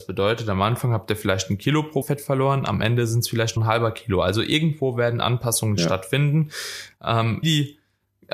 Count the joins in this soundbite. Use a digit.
3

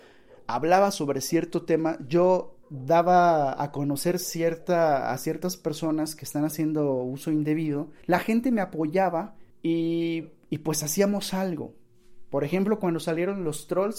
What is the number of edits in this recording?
3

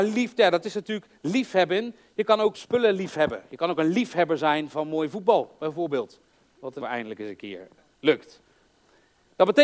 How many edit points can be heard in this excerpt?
2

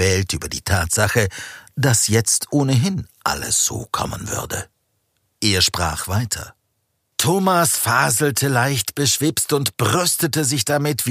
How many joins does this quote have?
0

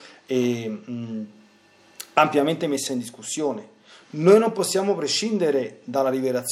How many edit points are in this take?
0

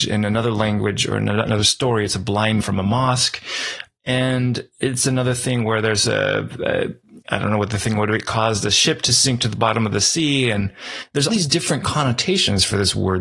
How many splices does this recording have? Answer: 3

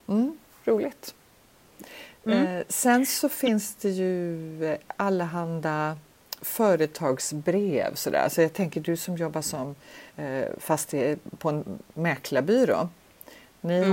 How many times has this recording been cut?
1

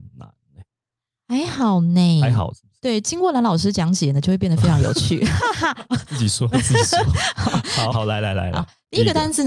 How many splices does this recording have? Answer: 2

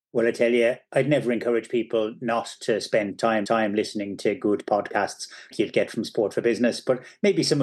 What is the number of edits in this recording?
2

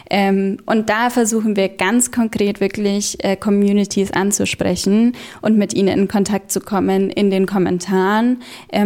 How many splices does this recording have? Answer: 0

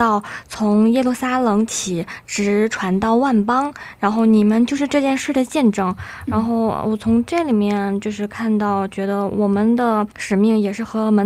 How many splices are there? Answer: 1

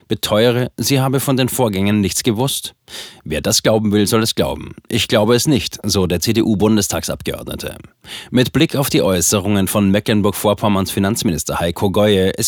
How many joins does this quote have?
0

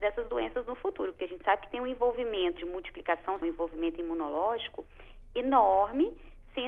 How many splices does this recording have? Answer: 2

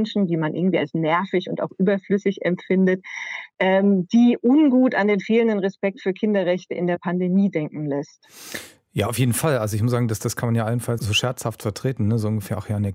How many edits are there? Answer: 1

